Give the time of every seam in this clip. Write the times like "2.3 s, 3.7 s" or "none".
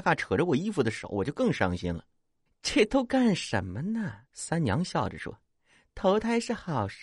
2.5 s, 4.3 s, 5.5 s